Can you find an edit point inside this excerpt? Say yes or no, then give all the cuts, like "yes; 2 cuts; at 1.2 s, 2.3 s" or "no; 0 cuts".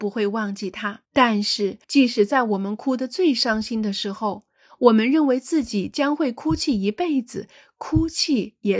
yes; 2 cuts; at 1.0 s, 1.8 s